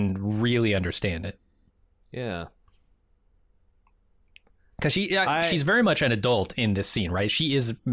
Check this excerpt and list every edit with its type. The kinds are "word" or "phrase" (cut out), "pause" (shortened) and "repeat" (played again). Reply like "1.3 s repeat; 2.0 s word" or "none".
none